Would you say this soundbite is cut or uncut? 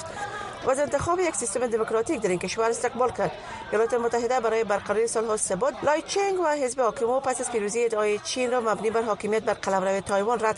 cut